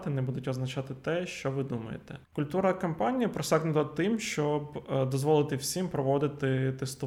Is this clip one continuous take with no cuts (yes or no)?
no